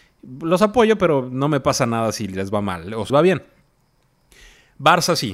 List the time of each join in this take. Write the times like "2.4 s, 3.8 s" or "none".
3.1 s